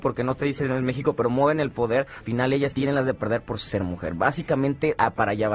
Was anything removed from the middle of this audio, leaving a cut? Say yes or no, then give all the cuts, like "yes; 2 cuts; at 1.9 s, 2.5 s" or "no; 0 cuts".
yes; 2 cuts; at 2.2 s, 2.7 s